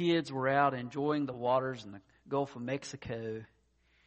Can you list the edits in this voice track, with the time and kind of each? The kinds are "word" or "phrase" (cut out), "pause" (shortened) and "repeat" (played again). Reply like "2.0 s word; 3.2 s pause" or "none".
none